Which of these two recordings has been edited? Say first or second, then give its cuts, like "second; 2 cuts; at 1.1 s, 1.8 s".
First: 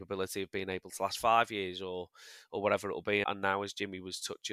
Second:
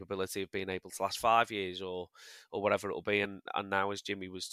first; 1 cut; at 3.2 s